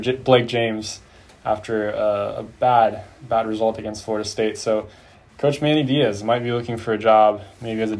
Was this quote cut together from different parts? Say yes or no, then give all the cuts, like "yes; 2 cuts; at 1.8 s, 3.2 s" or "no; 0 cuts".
no; 0 cuts